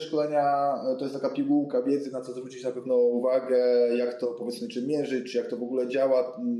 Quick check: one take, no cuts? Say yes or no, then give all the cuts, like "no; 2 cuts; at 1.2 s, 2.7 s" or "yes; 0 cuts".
yes; 0 cuts